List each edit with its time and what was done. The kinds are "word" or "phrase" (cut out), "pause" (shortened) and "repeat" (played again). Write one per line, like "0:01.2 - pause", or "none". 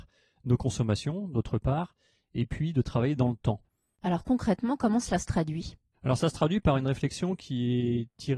none